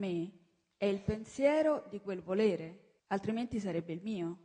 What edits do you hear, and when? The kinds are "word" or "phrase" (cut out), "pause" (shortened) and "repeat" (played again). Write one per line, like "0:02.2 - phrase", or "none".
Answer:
0:03.0 - pause